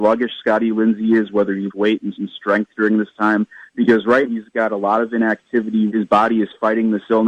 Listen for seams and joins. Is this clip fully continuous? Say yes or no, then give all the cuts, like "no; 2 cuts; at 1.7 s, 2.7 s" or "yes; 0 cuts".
no; 4 cuts; at 1.7 s, 2.1 s, 4.2 s, 5.9 s